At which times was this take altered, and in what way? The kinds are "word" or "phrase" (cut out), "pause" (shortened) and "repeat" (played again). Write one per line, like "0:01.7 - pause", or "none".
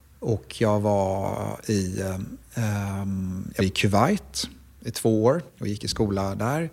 0:03.6 - word
0:05.5 - pause